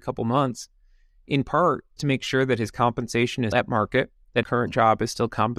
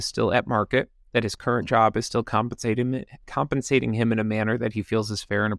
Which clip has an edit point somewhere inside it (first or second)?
first